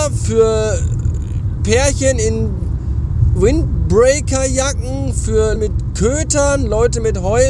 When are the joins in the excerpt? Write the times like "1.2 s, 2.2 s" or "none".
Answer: 1.6 s, 3.4 s, 5.6 s